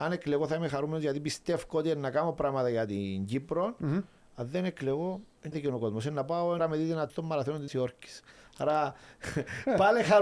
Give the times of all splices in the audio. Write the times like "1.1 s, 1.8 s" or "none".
5.5 s, 6.6 s, 7.1 s, 7.7 s